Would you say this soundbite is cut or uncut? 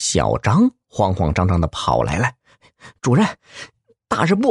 cut